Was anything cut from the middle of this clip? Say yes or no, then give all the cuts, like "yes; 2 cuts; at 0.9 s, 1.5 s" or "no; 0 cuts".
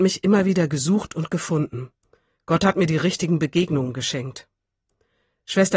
no; 0 cuts